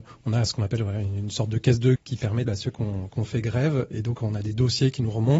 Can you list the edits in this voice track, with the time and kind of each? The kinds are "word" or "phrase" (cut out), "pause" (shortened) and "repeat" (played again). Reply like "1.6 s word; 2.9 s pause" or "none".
2.0 s word; 2.4 s word; 3.1 s word; 3.9 s word